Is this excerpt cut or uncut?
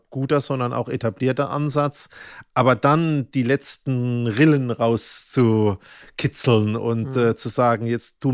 uncut